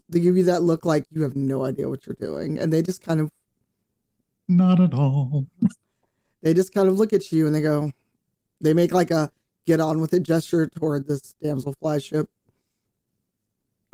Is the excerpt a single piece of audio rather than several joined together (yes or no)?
yes